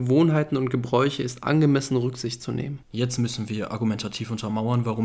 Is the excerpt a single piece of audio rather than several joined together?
no; 1 cut; at 2.8 s

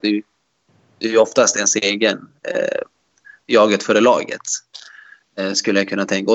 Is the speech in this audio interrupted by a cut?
no; 0 cuts

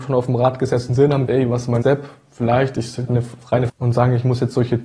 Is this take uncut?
no; 4 cuts; at 1.3 s, 1.8 s, 3.1 s, 3.7 s

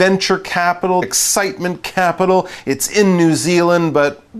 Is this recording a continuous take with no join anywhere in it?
no; 1 cut; at 1.0 s

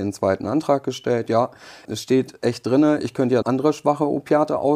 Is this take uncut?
no; 2 cuts; at 1.8 s, 3.4 s

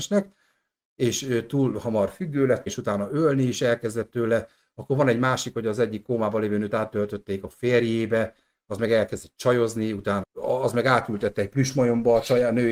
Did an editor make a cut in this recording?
yes; 3 cuts; at 2.7 s, 6.7 s, 10.2 s

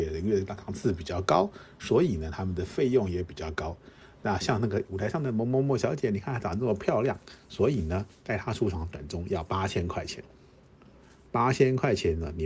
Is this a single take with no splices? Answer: yes; 0 cuts

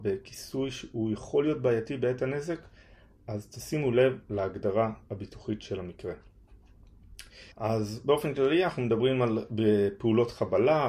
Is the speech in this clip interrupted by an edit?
yes; 1 cut; at 7.5 s

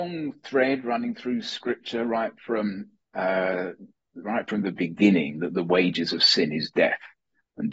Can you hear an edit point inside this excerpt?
no; 0 cuts

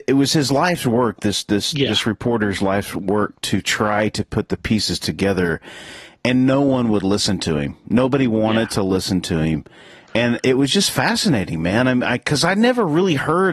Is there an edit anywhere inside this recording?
no; 0 cuts

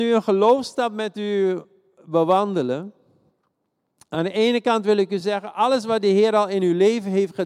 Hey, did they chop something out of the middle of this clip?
no; 0 cuts

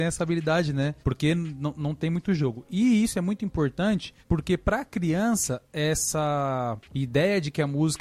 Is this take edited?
yes; 3 cuts; at 1.0 s, 4.2 s, 6.8 s

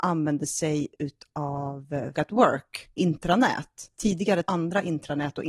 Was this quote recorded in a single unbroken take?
no; 3 cuts; at 2.1 s, 3.0 s, 4.4 s

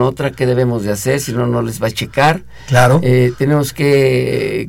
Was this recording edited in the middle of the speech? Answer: no; 0 cuts

